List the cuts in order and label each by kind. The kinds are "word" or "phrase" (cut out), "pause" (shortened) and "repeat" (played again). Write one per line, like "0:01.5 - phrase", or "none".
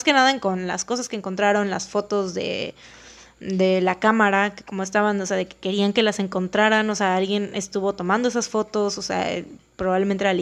none